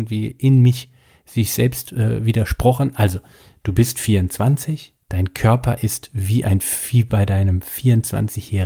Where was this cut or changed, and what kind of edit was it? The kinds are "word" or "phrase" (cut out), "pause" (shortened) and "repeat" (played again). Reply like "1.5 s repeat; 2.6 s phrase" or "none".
5.0 s pause